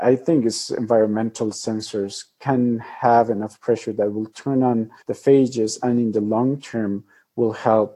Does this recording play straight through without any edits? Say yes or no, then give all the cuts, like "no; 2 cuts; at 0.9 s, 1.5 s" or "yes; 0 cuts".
no; 1 cut; at 5.0 s